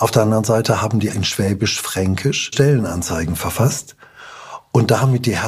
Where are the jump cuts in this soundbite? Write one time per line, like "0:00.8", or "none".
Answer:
0:01.1
0:02.5